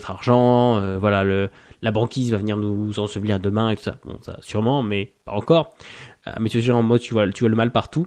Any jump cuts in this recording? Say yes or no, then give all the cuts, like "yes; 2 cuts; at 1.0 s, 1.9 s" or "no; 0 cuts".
no; 0 cuts